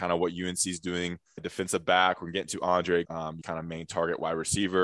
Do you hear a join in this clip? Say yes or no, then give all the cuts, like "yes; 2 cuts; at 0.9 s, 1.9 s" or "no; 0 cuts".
yes; 3 cuts; at 1.4 s, 3.0 s, 3.4 s